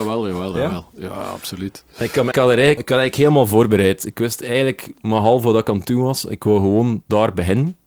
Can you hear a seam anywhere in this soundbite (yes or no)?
yes